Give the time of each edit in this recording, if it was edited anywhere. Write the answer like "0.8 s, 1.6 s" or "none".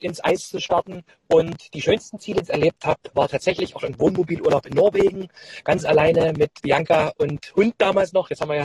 1.1 s, 2.4 s, 3.1 s, 6.6 s